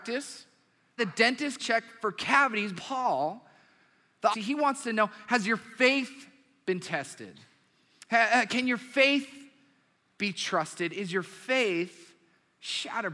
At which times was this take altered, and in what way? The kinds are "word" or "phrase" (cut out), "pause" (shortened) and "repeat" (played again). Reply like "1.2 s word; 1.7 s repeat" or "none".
1.0 s phrase; 1.6 s word; 2.7 s word; 4.3 s phrase